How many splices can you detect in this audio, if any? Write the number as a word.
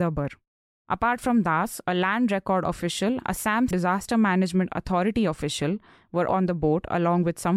three